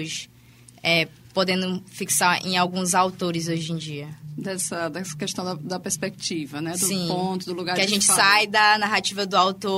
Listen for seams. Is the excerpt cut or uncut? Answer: uncut